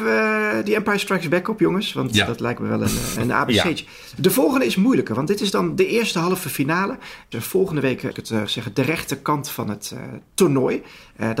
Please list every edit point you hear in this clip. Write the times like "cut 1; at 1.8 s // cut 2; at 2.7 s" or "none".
cut 1; at 3.2 s // cut 2; at 7.3 s // cut 3; at 8.1 s // cut 4; at 8.5 s

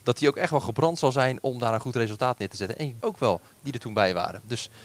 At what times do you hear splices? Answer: cut 1; at 3.0 s

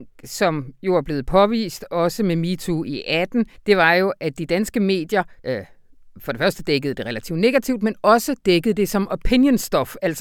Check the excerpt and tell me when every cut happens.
cut 1; at 3.6 s // cut 2; at 5.4 s

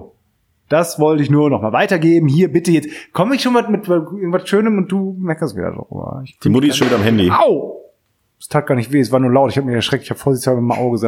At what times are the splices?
none

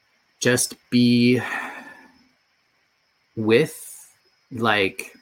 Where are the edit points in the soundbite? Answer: none

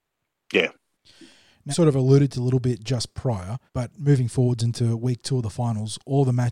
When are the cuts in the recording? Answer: cut 1; at 1.7 s // cut 2; at 2.3 s // cut 3; at 3.7 s

